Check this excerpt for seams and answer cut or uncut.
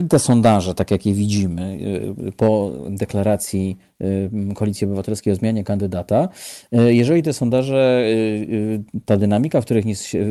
uncut